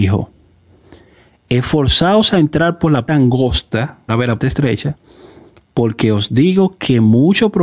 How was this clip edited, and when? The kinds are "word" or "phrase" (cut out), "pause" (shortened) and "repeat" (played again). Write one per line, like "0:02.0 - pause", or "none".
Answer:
0:03.1 - word
0:04.1 - word
0:04.4 - word